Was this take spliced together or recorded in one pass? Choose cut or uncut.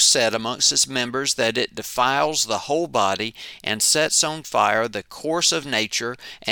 uncut